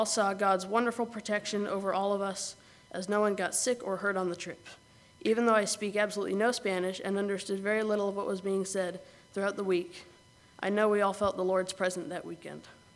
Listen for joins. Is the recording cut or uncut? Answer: uncut